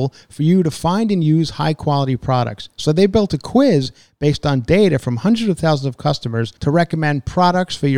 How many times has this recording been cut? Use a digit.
1